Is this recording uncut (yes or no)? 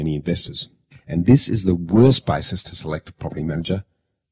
no